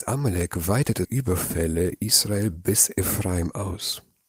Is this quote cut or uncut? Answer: cut